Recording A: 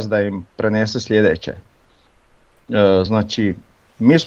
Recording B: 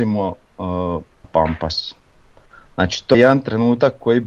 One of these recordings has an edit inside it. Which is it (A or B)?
B